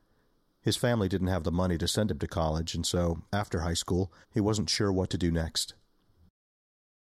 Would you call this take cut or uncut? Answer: cut